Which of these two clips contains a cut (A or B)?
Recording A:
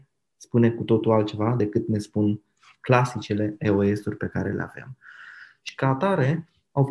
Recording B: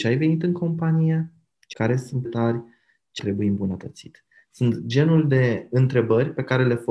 B